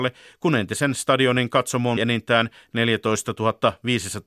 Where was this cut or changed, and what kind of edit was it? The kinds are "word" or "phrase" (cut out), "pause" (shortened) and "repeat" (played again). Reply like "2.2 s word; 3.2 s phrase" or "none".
2.0 s word

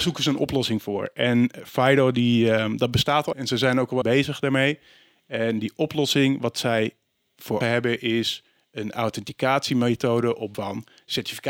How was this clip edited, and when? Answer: 3.3 s word; 4.0 s word; 7.6 s word; 10.5 s word

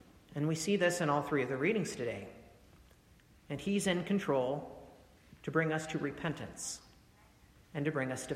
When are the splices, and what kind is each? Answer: none

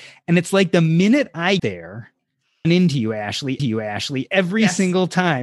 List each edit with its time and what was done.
1.6 s word; 2.6 s phrase; 3.6 s repeat

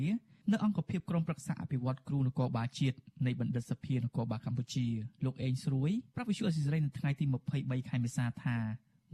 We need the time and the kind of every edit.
5.1 s pause

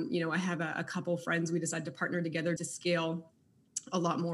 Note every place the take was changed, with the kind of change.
2.6 s word

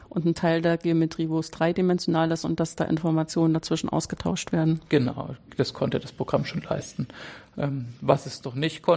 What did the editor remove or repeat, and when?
4.8 s pause

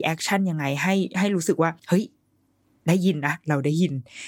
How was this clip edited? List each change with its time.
1.8 s pause

